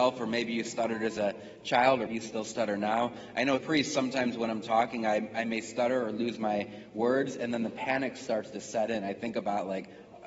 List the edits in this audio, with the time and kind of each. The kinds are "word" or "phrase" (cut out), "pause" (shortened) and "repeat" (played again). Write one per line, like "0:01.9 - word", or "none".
0:02.1 - word
0:03.6 - phrase

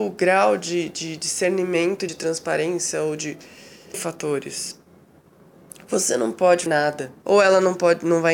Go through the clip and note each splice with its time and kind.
0:02.1 - phrase
0:03.9 - word
0:06.7 - word
0:07.2 - pause

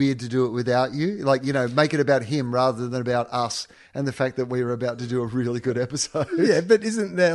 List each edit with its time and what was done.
none

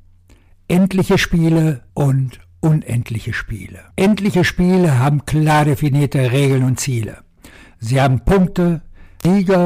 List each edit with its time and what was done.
0:01.9 - pause
0:03.9 - pause

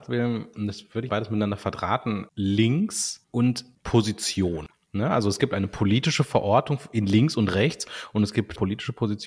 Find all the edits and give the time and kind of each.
0:01.1 - phrase

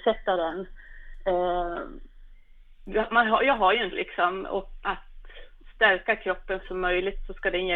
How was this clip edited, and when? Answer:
0:03.9 - word
0:04.8 - word
0:06.6 - phrase

